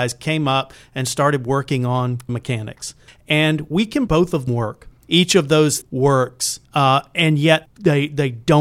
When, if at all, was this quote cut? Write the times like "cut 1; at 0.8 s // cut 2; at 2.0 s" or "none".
cut 1; at 2.3 s // cut 2; at 3.1 s // cut 3; at 4.1 s // cut 4; at 4.5 s // cut 5; at 5.0 s // cut 6; at 5.8 s // cut 7; at 6.6 s // cut 8; at 7.7 s